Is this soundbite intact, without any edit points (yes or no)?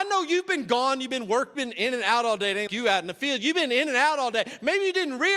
no